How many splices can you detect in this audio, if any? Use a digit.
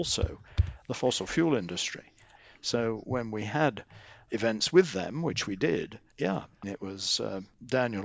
2